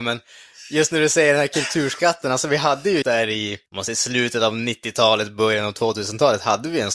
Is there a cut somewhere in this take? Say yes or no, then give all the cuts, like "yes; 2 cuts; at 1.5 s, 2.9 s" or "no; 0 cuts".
yes; 2 cuts; at 3.0 s, 3.7 s